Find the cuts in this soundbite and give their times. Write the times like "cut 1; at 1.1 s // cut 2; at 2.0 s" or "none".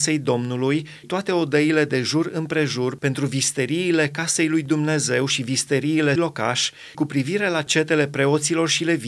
cut 1; at 1.0 s // cut 2; at 6.2 s // cut 3; at 6.9 s